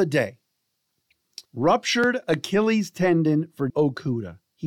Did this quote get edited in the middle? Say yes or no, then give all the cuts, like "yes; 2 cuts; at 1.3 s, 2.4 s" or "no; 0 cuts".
yes; 2 cuts; at 1.5 s, 3.7 s